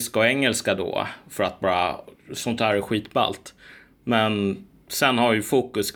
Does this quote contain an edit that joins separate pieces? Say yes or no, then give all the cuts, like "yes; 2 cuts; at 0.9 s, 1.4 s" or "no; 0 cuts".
no; 0 cuts